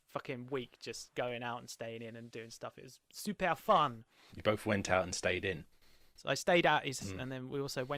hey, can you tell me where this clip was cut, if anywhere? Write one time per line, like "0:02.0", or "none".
0:02.3
0:07.0

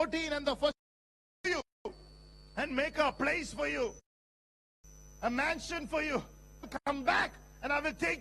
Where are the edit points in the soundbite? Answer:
none

